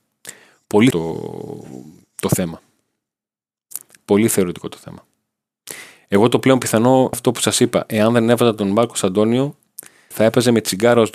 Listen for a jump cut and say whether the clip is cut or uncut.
cut